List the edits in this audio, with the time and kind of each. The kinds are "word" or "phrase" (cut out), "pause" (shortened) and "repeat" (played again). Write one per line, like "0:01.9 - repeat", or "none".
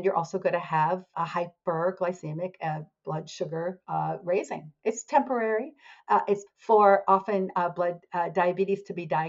0:01.1 - word
0:06.5 - word